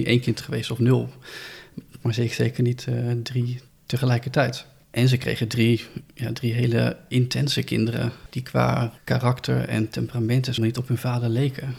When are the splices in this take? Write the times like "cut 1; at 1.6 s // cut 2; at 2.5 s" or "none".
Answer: cut 1; at 3.7 s // cut 2; at 10.6 s